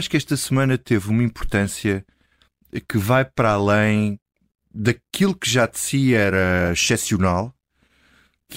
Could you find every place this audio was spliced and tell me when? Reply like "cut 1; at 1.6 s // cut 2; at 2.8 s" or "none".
none

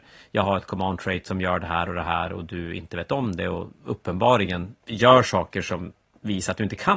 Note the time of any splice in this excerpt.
cut 1; at 4.8 s

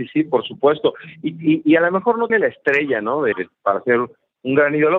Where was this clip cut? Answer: cut 1; at 2.3 s // cut 2; at 3.3 s

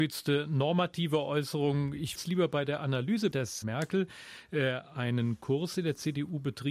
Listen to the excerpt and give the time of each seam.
cut 1; at 2.2 s // cut 2; at 3.3 s // cut 3; at 3.6 s

